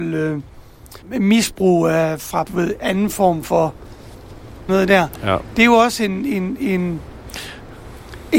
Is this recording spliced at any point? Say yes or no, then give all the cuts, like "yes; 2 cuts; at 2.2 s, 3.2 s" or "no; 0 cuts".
yes; 3 cuts; at 1.0 s, 2.4 s, 4.7 s